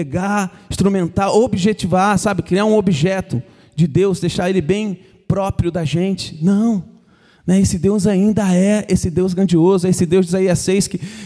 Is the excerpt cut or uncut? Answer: uncut